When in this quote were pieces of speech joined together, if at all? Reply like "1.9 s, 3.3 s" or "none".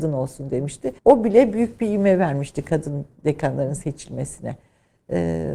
1.0 s